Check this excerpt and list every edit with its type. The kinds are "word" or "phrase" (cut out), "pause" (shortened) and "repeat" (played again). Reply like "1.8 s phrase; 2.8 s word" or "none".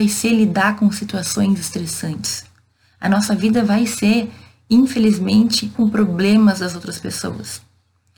5.7 s word